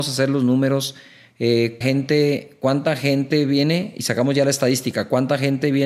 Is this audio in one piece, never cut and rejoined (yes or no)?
no